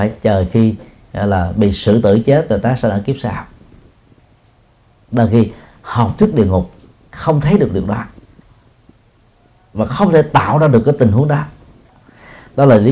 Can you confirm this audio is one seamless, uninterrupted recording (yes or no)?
yes